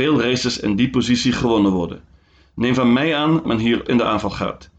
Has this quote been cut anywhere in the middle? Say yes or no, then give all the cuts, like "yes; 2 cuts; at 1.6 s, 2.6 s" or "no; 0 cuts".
yes; 2 cuts; at 3.4 s, 3.9 s